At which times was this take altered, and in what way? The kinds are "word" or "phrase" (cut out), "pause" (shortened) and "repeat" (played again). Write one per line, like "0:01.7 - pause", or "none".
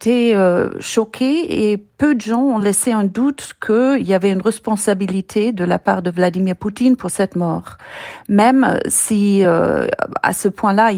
none

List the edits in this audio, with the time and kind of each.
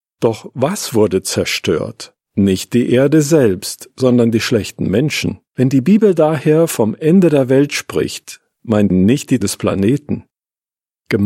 0:02.2 - pause
0:05.5 - pause
0:08.9 - word
0:09.4 - word

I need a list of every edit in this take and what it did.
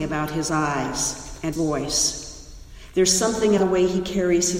0:01.5 - word
0:03.6 - word

